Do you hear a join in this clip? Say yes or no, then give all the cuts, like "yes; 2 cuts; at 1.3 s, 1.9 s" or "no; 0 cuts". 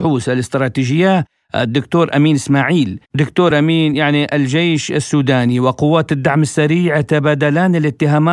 no; 0 cuts